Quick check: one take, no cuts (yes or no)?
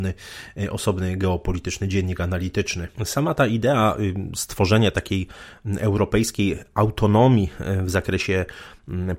no